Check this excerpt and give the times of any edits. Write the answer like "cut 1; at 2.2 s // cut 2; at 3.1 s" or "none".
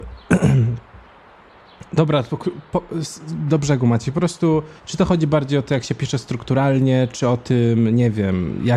cut 1; at 4.8 s